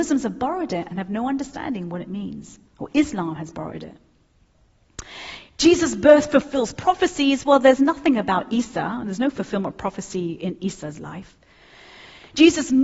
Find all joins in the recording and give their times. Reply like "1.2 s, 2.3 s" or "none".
2.7 s